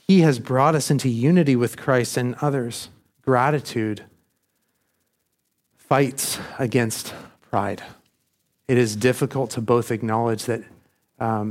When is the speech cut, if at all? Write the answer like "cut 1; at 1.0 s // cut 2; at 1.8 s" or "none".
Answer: cut 1; at 3.1 s